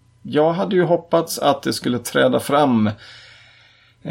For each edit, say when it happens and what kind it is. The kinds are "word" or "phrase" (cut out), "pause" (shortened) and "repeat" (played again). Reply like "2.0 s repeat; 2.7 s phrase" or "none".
none